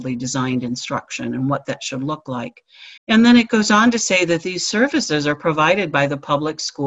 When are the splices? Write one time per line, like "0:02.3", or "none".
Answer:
0:03.0